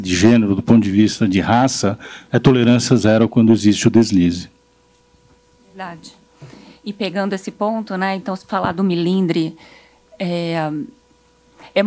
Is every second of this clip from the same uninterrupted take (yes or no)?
yes